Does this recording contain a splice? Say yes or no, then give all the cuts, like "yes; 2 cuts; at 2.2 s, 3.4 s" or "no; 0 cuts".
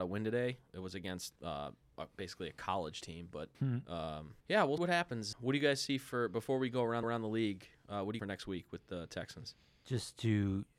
yes; 7 cuts; at 1.4 s, 3.5 s, 4.4 s, 4.8 s, 5.3 s, 7.0 s, 8.2 s